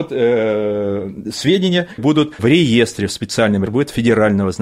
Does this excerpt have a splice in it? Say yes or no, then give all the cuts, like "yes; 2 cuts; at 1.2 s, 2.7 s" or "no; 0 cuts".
yes; 3 cuts; at 2.0 s, 2.4 s, 3.7 s